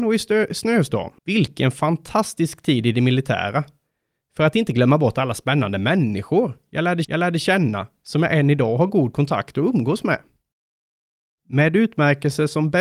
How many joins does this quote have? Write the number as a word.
two